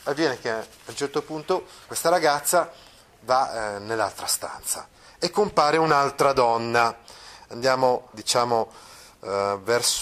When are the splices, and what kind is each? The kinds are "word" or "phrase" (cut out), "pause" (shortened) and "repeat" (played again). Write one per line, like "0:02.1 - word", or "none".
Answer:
0:01.9 - word
0:08.1 - word